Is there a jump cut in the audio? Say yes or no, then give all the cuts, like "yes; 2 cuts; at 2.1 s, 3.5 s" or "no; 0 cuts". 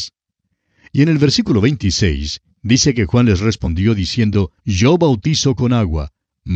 yes; 1 cut; at 4.6 s